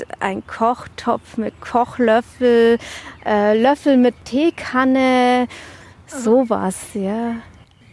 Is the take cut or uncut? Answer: uncut